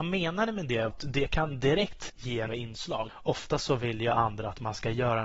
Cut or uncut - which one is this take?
cut